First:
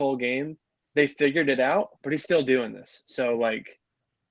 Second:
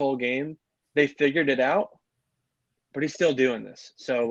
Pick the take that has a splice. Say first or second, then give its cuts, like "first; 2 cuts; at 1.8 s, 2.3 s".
first; 1 cut; at 1.9 s